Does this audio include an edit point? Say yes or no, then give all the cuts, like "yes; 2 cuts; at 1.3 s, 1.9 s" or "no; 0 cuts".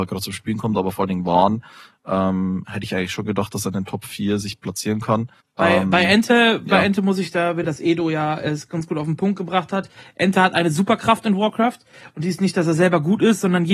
yes; 2 cuts; at 5.4 s, 7.6 s